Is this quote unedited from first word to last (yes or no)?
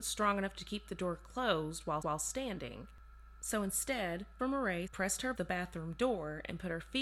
no